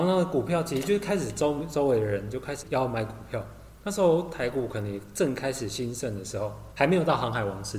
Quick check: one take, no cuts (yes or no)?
no